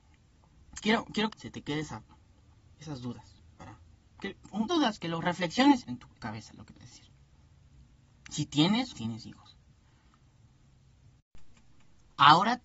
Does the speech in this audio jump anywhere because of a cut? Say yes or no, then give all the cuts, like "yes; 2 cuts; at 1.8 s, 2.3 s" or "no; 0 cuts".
yes; 6 cuts; at 1.3 s, 4.7 s, 5.8 s, 6.2 s, 6.8 s, 8.9 s